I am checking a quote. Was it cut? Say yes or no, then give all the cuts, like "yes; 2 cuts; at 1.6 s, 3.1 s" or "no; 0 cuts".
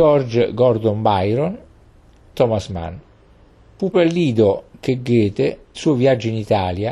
yes; 3 cuts; at 2.3 s, 3.9 s, 5.7 s